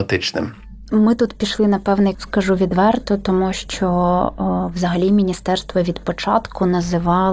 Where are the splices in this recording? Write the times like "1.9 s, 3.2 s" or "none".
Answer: 2.1 s